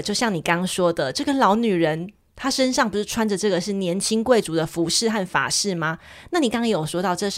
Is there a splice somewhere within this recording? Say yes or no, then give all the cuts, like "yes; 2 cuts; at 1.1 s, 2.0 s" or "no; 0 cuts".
no; 0 cuts